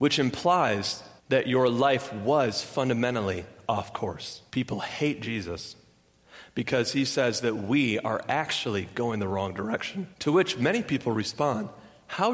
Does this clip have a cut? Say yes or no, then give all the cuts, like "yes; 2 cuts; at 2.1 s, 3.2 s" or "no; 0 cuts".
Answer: yes; 3 cuts; at 1.2 s, 4.5 s, 10.1 s